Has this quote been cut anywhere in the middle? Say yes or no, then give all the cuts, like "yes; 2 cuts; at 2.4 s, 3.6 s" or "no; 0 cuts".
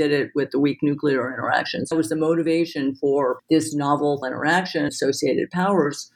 yes; 4 cuts; at 1.9 s, 3.4 s, 4.2 s, 4.9 s